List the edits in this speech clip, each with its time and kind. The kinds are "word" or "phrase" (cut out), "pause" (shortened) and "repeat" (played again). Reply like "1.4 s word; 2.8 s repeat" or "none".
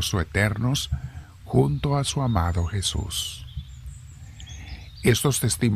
none